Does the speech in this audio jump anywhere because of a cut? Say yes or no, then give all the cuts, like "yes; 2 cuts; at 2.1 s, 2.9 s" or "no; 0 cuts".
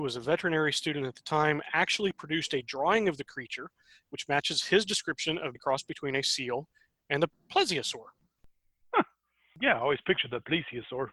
yes; 1 cut; at 5.5 s